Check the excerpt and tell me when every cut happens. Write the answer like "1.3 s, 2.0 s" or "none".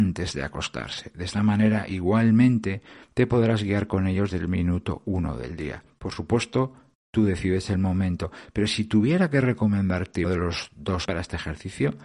4.3 s, 10.2 s, 11.0 s